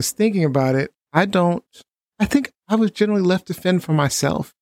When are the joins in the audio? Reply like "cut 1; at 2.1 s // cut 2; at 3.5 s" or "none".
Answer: cut 1; at 1.9 s